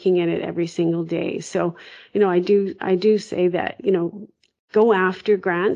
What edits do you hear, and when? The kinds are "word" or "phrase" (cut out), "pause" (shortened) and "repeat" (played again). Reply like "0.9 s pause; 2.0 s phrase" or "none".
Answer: none